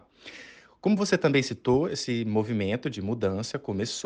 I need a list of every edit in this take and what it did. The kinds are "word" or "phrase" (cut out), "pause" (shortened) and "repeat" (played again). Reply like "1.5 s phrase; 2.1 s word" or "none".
none